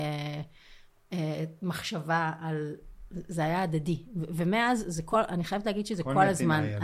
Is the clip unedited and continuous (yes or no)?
yes